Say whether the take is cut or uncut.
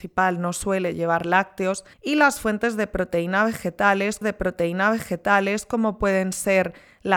cut